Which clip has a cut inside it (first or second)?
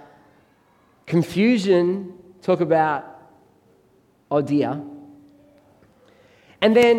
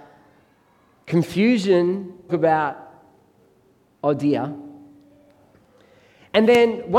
second